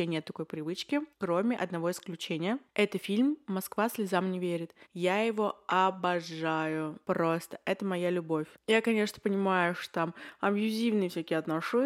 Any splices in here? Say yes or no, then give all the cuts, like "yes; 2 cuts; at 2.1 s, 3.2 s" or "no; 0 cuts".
yes; 3 cuts; at 1.1 s, 4.8 s, 7.0 s